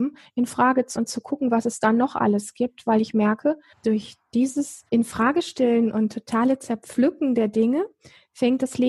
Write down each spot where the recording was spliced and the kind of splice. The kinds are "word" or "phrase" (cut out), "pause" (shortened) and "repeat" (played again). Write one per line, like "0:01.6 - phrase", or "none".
0:01.0 - word
0:03.7 - word
0:04.9 - pause